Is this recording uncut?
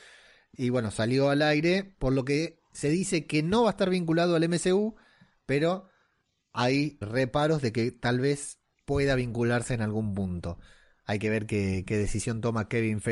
no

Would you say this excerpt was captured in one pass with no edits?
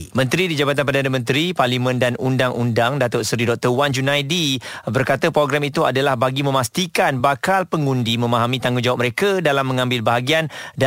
yes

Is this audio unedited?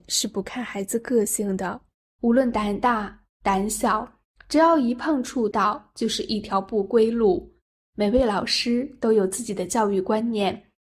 yes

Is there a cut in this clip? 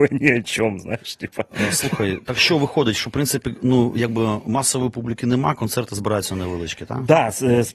no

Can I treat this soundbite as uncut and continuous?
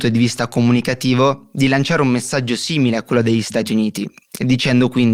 yes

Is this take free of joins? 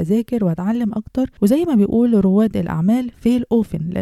yes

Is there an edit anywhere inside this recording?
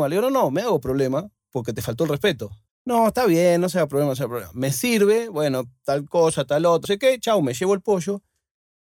yes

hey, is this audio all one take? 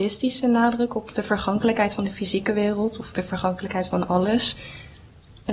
no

